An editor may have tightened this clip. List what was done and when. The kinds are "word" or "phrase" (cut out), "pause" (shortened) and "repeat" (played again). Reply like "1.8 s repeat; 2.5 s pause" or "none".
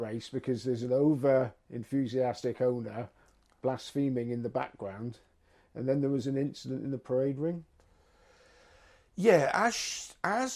none